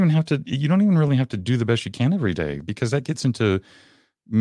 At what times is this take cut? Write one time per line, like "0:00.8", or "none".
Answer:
none